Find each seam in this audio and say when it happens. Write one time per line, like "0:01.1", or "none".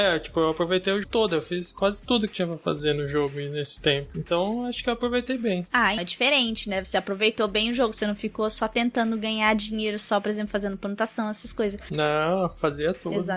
0:01.0
0:06.0